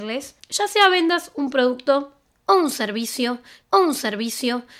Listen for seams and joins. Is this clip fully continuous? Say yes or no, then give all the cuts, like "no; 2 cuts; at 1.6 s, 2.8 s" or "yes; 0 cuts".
no; 1 cut; at 3.6 s